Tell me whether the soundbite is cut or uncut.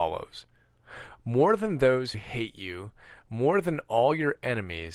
cut